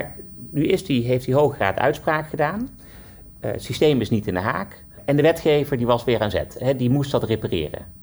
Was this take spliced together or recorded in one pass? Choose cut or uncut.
uncut